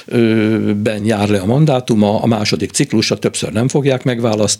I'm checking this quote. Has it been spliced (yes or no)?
no